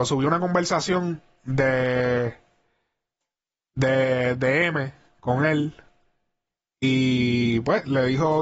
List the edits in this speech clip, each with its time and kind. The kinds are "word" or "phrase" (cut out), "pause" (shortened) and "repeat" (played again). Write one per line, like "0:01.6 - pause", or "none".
none